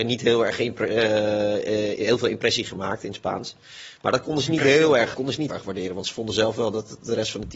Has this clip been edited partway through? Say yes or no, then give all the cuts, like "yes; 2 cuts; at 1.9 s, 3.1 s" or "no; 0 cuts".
yes; 2 cuts; at 5.1 s, 5.5 s